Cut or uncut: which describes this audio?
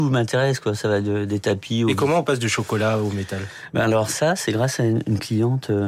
uncut